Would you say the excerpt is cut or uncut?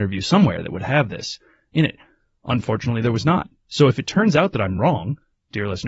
uncut